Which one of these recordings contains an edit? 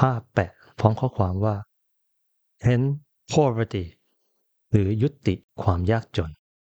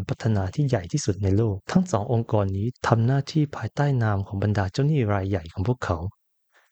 second; 2 cuts; at 1.6 s, 2.8 s

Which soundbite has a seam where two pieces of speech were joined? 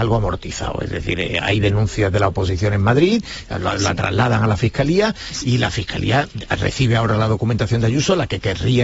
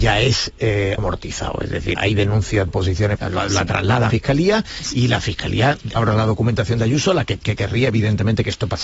second; 7 cuts; at 1.0 s, 1.9 s, 2.7 s, 3.1 s, 4.1 s, 6.0 s, 7.4 s

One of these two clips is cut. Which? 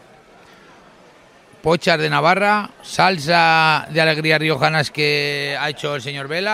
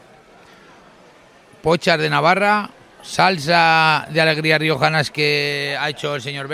first; 1 cut; at 2.7 s

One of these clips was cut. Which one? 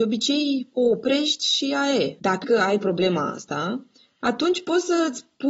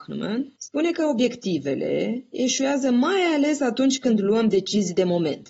first; 1 cut; at 2.4 s

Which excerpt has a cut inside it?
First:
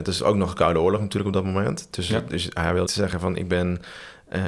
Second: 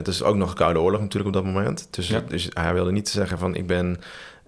first; 1 cut; at 2.9 s

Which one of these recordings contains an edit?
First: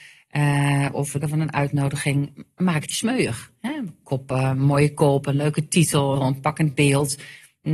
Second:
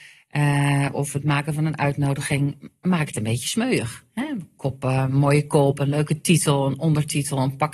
first; 3 cuts; at 1.2 s, 2.9 s, 6.2 s

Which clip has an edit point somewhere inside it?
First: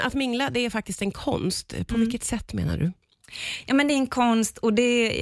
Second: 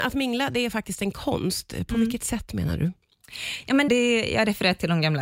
second; 1 cut; at 3.9 s

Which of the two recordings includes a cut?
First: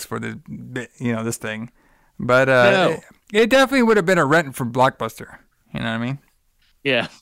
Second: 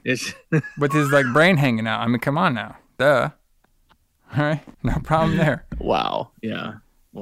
second; 2 cuts; at 2.9 s, 4.7 s

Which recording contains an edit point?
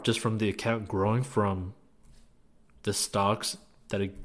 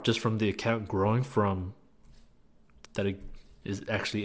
second; 1 cut; at 2.9 s

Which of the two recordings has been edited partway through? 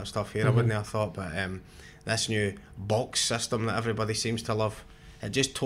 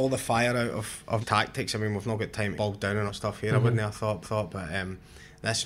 second; 4 cuts; at 1.2 s, 2.5 s, 3.1 s, 4.2 s

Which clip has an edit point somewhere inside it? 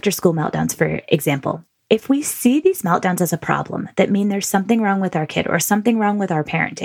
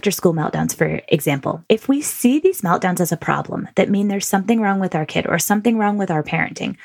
second; 1 cut; at 1.7 s

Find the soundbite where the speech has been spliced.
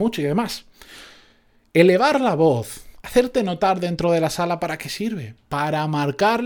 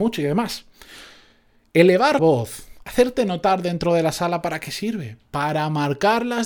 second; 1 cut; at 2.2 s

